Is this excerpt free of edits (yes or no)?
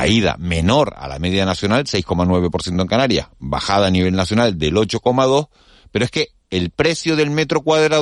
yes